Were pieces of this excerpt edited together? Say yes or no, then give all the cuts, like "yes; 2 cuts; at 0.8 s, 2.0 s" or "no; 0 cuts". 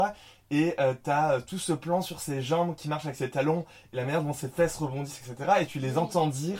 no; 0 cuts